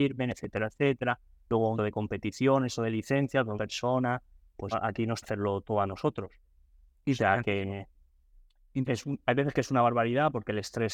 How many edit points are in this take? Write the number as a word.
six